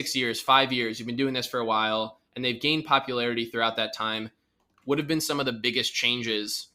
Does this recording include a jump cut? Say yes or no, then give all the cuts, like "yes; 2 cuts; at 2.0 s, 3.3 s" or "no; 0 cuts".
no; 0 cuts